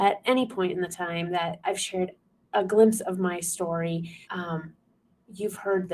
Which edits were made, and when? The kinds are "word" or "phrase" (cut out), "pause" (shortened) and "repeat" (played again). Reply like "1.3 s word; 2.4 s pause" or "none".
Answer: 1.6 s word; 2.3 s pause; 4.2 s pause